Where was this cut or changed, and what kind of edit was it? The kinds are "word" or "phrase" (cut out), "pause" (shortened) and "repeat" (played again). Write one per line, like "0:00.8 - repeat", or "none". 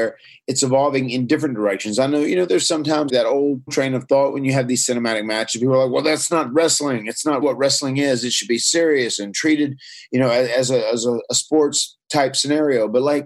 0:02.5 - word
0:03.1 - word
0:03.7 - word
0:07.4 - word